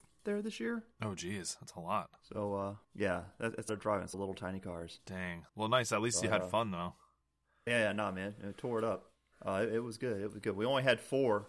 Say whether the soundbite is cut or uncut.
cut